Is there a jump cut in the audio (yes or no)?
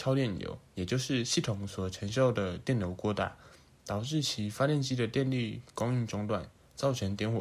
no